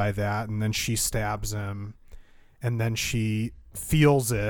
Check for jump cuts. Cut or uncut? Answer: uncut